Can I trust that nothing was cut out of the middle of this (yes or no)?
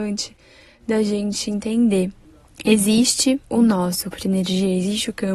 no